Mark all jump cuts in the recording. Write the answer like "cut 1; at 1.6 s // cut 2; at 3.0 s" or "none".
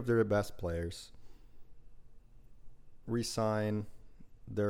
cut 1; at 3.0 s